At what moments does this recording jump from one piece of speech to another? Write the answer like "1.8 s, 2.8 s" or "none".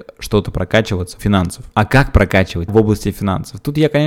1.2 s, 1.7 s, 2.7 s